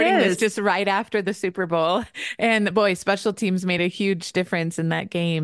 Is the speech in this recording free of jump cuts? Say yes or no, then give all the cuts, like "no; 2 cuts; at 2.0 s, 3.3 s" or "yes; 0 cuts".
yes; 0 cuts